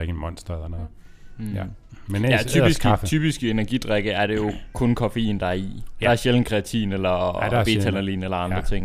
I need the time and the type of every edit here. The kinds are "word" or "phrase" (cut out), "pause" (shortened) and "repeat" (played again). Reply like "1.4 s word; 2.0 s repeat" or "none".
none